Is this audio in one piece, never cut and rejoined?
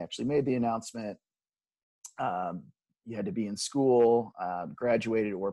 yes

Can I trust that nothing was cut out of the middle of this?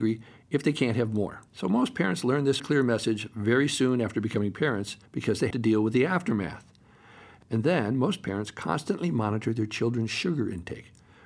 no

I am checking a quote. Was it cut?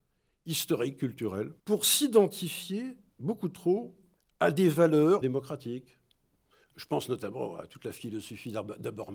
yes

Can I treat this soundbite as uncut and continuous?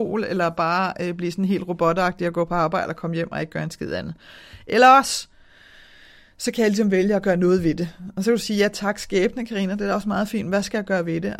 yes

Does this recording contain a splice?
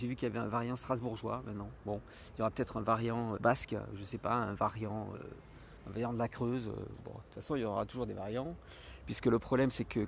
yes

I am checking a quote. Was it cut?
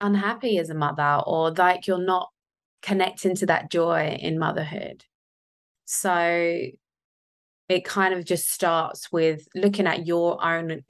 no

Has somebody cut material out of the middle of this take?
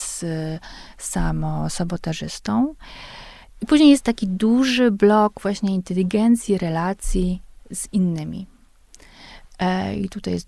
no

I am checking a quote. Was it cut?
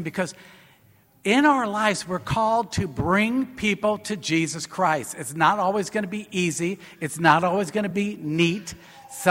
no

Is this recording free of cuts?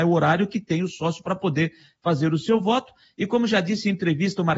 yes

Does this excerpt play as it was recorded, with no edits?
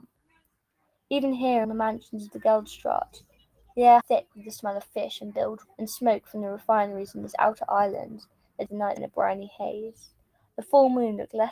no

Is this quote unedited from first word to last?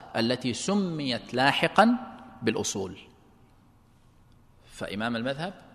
yes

